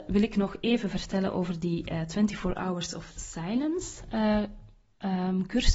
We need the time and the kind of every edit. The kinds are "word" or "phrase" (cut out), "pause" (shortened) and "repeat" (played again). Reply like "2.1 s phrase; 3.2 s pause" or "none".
none